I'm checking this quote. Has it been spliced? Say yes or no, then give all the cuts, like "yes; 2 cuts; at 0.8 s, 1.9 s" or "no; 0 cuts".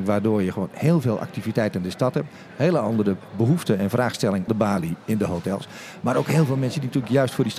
yes; 1 cut; at 4.5 s